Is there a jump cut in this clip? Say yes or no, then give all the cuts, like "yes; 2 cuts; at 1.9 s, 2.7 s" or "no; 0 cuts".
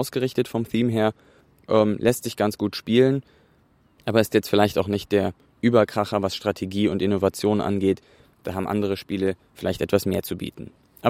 no; 0 cuts